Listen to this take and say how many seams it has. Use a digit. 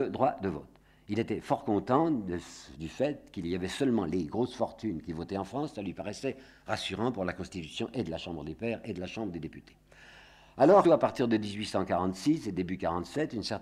1